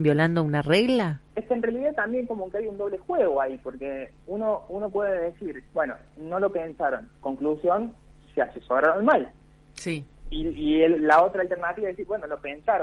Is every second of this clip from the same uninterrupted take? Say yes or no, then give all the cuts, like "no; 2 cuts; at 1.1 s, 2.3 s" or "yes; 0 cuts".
no; 4 cuts; at 1.3 s, 4.2 s, 5.7 s, 7.2 s